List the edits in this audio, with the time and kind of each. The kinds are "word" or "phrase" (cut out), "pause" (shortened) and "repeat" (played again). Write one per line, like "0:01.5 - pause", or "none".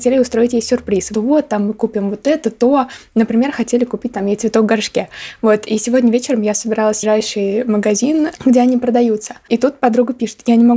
0:01.1 - phrase
0:07.0 - phrase